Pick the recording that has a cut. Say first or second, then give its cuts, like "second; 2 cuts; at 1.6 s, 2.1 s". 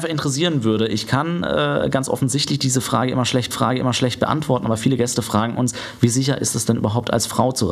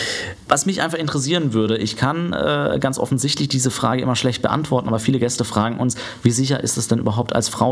first; 1 cut; at 3.5 s